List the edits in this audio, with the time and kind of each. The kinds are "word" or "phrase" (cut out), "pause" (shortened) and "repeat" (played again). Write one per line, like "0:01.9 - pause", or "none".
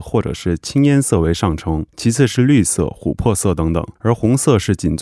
0:01.9 - pause
0:04.0 - pause